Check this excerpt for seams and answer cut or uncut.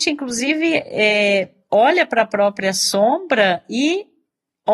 uncut